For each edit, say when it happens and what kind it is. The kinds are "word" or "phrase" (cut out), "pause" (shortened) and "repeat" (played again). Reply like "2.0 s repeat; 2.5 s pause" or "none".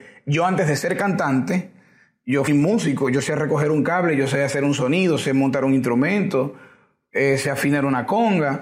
2.5 s word